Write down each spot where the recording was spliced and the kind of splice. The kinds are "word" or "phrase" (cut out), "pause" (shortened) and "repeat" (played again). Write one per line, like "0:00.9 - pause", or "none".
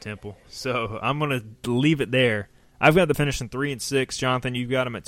0:03.1 - word